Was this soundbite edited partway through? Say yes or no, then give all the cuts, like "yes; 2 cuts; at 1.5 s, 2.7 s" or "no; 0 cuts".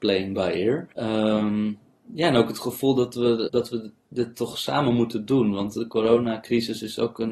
yes; 2 cuts; at 0.9 s, 3.5 s